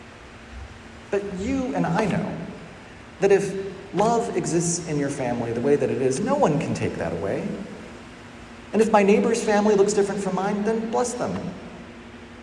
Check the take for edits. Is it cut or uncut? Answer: uncut